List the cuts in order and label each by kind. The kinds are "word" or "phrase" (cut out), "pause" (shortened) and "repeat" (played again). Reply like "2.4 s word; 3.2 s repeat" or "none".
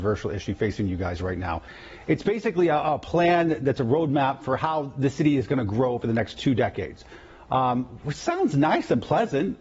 none